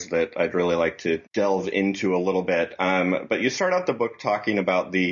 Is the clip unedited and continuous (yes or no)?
no